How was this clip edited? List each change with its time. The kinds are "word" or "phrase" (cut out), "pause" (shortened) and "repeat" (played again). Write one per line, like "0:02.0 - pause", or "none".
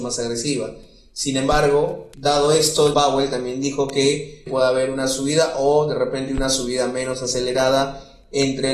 0:02.1 - word
0:02.9 - word
0:04.5 - word